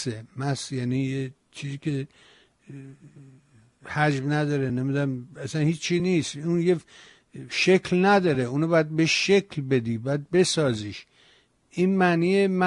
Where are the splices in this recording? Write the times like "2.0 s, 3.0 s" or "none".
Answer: none